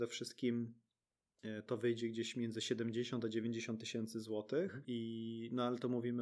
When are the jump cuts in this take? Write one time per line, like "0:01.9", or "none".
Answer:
0:01.7